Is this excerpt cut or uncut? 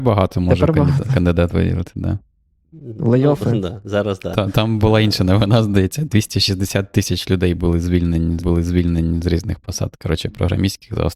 cut